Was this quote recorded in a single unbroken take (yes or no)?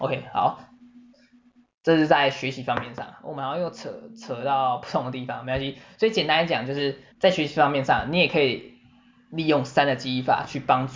no